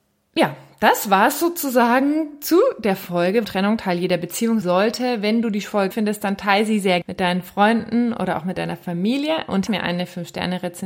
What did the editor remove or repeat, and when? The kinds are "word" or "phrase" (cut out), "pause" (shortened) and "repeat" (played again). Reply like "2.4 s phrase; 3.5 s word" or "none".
3.4 s word; 4.6 s word; 5.9 s word; 7.0 s word; 9.7 s word